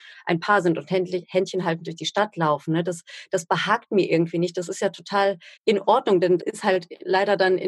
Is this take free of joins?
no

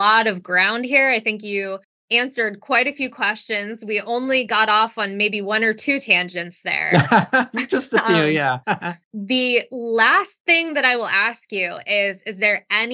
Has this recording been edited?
no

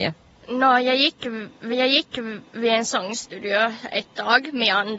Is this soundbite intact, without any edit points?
no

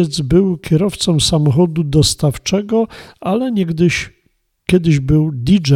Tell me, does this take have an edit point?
no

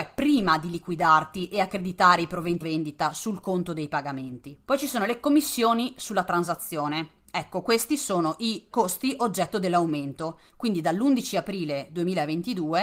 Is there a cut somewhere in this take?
yes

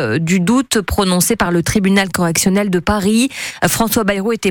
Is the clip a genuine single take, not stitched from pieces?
yes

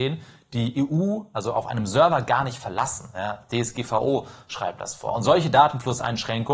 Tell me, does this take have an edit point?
no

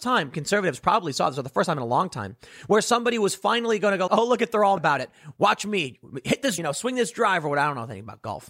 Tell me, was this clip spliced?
yes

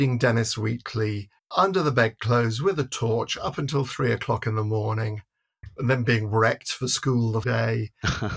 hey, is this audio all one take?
no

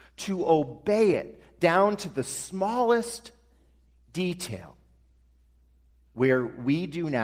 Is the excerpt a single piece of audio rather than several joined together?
yes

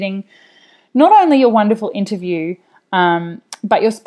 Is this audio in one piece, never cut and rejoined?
yes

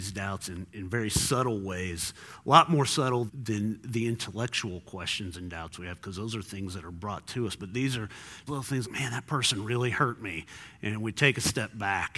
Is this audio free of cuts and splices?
no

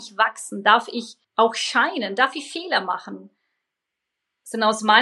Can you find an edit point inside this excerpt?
yes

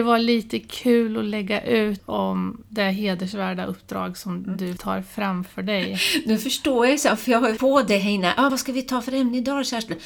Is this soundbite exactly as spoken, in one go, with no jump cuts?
no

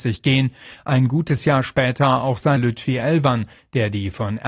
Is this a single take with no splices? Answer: no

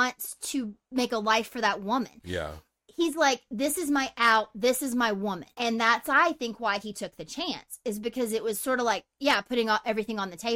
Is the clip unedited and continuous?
no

